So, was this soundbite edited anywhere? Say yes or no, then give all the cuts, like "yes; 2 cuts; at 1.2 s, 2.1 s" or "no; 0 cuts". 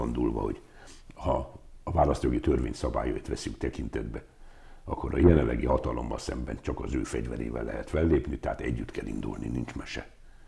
no; 0 cuts